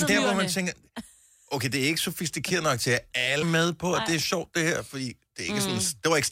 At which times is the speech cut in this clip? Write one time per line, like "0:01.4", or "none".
0:03.4